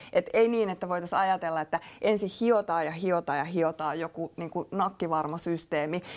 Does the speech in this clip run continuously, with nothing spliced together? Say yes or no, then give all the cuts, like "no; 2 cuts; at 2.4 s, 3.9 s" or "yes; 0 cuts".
yes; 0 cuts